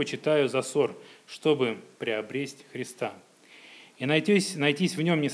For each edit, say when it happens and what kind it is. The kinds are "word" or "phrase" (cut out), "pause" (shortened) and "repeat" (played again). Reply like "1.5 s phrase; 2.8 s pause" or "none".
none